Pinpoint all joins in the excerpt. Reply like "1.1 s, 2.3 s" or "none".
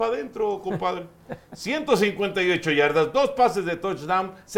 none